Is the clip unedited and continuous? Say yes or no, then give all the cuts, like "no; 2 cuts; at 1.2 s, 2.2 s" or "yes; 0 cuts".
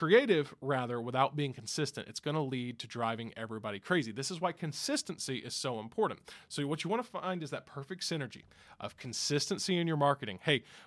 yes; 0 cuts